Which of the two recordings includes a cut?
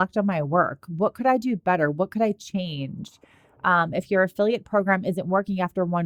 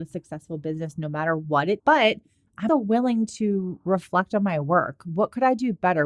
second; 2 cuts; at 1.8 s, 2.7 s

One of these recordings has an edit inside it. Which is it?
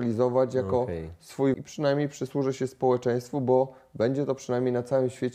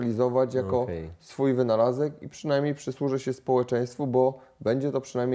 first; 1 cut; at 1.5 s

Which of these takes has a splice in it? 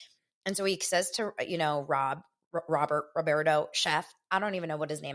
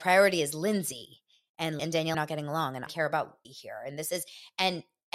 second; 4 cuts; at 1.8 s, 2.1 s, 2.9 s, 3.4 s

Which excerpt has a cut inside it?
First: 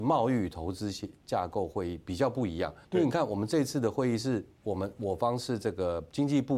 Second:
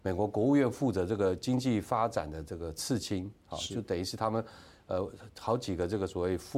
first; 1 cut; at 2.8 s

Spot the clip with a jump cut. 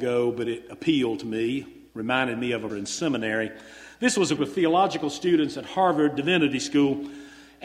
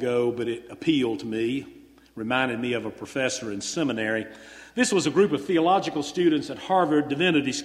first; 3 cuts; at 1.9 s, 2.7 s, 4.4 s

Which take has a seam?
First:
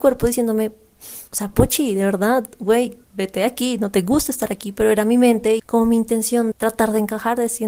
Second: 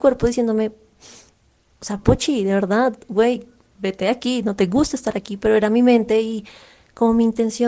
first; 4 cuts; at 1.3 s, 3.0 s, 5.6 s, 6.5 s

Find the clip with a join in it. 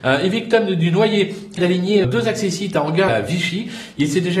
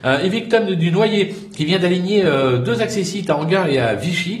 first; 3 cuts; at 1.6 s, 2.0 s, 3.1 s

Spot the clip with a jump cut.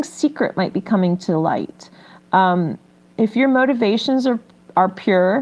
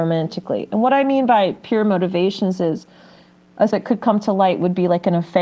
second; 1 cut; at 3.7 s

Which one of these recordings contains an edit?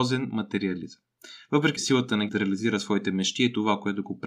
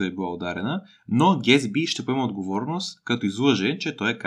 first; 2 cuts; at 1.8 s, 2.3 s

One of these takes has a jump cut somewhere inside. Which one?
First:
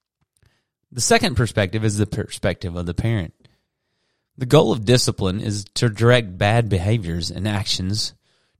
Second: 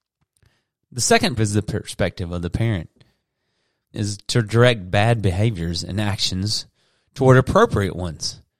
second; 2 cuts; at 1.4 s, 3.9 s

